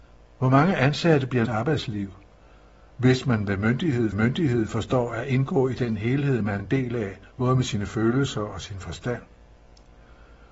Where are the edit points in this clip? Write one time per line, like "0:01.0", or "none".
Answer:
0:01.4
0:04.1
0:06.6
0:07.3